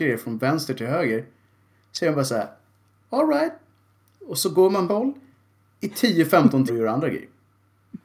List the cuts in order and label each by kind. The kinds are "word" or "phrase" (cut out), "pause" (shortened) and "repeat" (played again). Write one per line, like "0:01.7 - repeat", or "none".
0:04.9 - phrase
0:06.7 - word